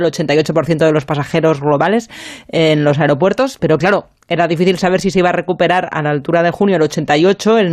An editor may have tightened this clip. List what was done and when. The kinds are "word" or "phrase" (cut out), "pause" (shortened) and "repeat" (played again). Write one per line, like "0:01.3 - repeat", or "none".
0:03.6 - word